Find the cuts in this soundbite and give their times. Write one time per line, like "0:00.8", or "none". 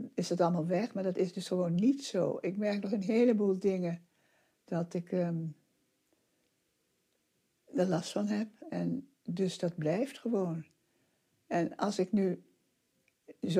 none